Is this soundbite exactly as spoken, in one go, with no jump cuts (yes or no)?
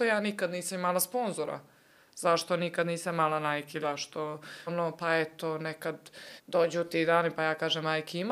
no